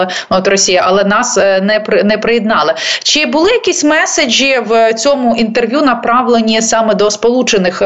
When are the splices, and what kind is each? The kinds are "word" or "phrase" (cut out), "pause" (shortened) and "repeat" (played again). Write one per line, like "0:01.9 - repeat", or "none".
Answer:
none